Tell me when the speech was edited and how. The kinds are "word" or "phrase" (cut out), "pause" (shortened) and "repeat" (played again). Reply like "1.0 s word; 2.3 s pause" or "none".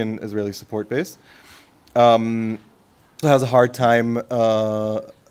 3.2 s word